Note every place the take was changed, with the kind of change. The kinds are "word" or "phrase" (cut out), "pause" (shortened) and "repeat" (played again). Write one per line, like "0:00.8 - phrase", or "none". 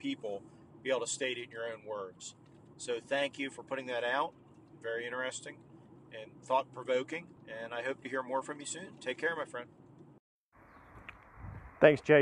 0:07.4 - pause